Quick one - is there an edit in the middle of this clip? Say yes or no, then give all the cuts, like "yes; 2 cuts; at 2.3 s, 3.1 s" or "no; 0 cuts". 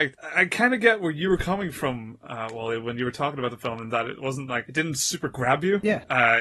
no; 0 cuts